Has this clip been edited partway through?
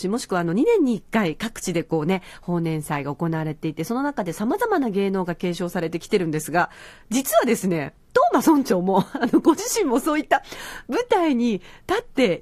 no; 0 cuts

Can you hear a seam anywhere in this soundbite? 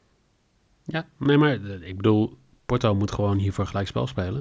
no; 0 cuts

